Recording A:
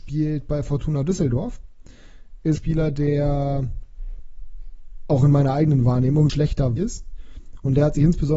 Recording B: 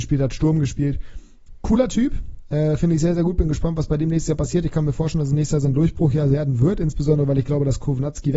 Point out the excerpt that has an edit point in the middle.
A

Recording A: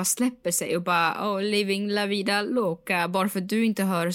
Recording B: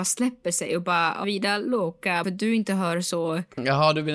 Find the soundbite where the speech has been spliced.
B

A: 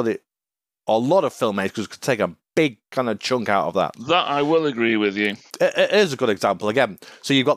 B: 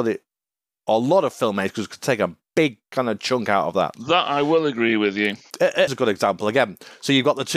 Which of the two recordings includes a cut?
B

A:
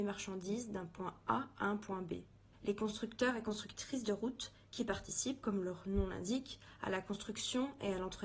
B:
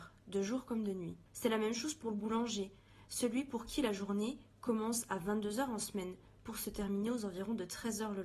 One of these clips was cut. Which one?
B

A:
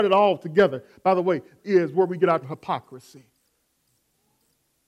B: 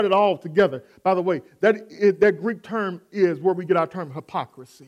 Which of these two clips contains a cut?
A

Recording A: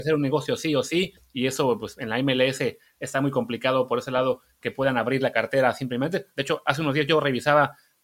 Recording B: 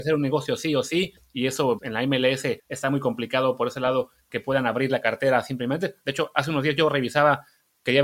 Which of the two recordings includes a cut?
B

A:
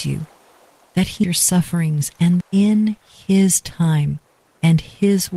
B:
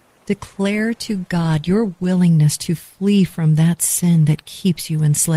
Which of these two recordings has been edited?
A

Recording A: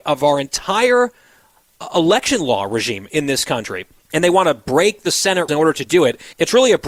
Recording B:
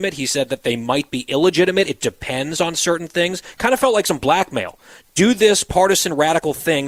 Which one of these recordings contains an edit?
A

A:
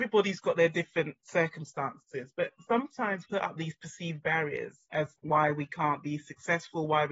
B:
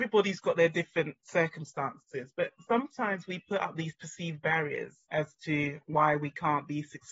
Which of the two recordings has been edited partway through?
A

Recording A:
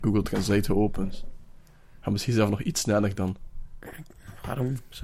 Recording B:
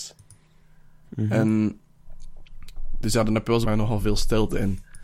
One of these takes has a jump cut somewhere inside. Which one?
B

